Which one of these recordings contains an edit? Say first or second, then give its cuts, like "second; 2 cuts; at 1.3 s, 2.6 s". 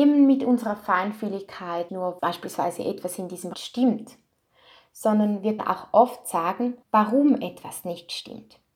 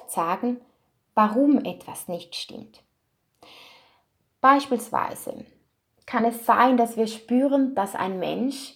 first; 5 cuts; at 1.9 s, 2.2 s, 3.5 s, 5.6 s, 6.8 s